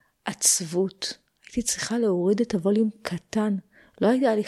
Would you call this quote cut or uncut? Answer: uncut